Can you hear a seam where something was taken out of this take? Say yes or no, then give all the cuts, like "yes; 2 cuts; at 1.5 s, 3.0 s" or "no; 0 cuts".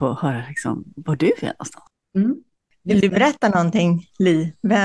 no; 0 cuts